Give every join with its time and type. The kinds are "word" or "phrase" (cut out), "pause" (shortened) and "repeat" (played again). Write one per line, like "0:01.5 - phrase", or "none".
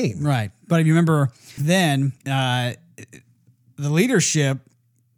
0:01.6 - word
0:02.2 - pause